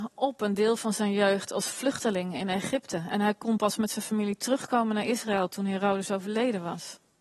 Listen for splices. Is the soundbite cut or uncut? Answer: uncut